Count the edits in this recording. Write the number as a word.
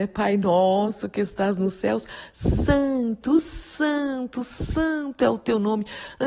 zero